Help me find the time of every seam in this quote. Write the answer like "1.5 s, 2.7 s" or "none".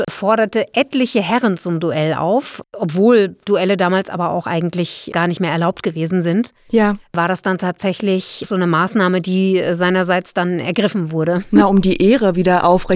8.4 s